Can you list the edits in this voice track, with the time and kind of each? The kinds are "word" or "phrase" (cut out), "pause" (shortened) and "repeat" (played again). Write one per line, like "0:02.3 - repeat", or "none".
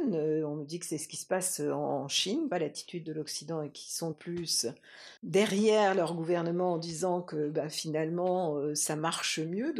0:02.5 - phrase
0:04.1 - phrase
0:05.2 - pause